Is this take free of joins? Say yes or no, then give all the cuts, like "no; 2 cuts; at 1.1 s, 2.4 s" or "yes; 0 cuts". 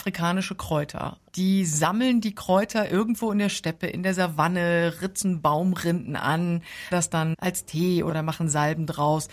no; 1 cut; at 6.9 s